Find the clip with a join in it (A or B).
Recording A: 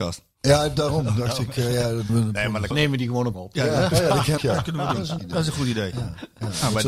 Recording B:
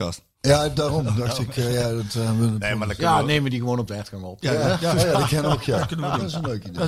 A